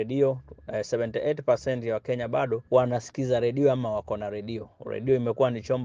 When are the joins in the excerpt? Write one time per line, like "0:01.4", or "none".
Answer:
0:02.7